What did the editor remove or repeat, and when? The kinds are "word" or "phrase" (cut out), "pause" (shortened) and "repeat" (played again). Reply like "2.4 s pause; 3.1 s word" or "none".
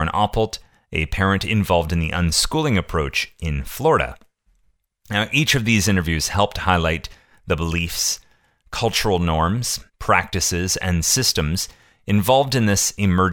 9.9 s pause